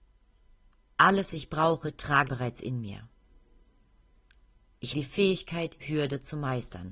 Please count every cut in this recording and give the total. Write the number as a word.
four